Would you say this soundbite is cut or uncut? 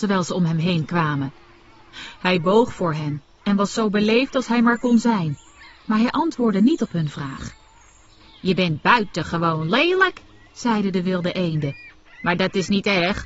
uncut